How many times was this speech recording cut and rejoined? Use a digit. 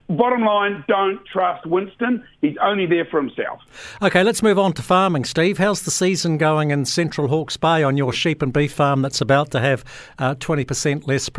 0